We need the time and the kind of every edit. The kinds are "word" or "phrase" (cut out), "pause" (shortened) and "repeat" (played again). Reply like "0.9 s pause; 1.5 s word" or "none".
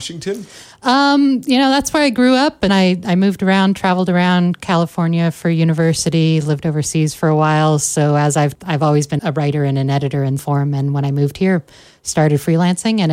2.7 s word; 8.5 s word; 9.2 s word; 10.4 s word

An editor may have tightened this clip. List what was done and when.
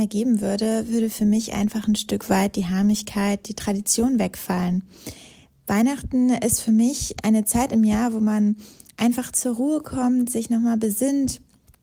none

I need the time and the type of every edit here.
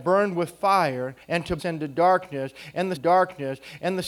1.2 s pause; 1.6 s word; 3.0 s repeat

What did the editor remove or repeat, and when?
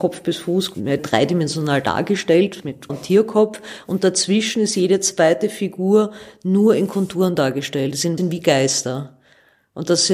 1.0 s word; 2.9 s word; 8.2 s word

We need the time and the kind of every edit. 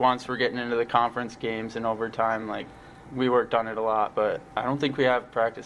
none

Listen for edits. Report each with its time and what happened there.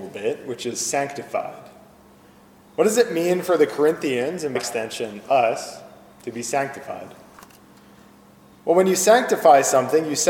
4.6 s word

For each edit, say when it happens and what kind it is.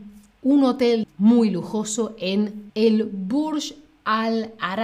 1.0 s phrase; 2.7 s word

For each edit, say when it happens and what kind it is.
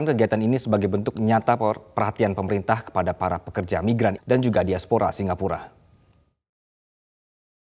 4.2 s word

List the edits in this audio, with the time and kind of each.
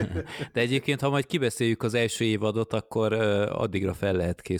none

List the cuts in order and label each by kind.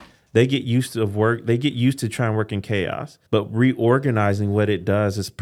3.3 s pause

